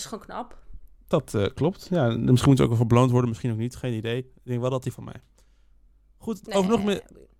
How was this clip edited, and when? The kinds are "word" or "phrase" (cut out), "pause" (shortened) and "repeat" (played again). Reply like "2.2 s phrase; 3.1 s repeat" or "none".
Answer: 4.9 s phrase